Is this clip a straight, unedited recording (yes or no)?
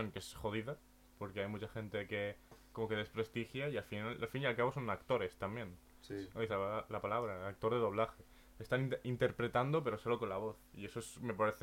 yes